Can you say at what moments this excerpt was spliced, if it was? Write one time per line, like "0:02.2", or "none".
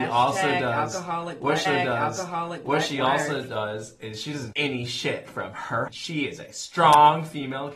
0:01.6
0:04.5
0:05.9